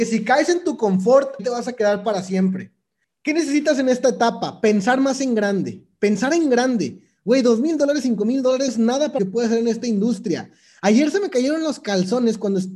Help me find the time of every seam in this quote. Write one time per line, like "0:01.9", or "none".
0:01.4
0:03.0
0:08.7
0:09.2

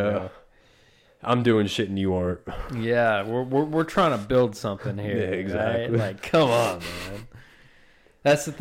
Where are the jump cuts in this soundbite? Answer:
none

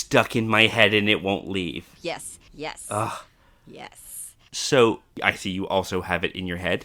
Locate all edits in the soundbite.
0:02.5

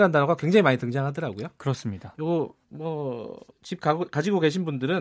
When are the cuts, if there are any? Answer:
0:03.5

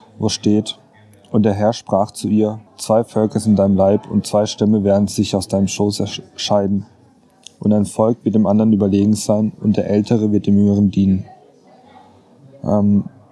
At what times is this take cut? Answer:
0:02.7

